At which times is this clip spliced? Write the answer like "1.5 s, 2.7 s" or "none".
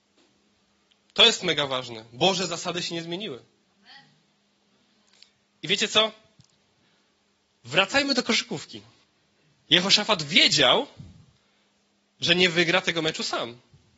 9.0 s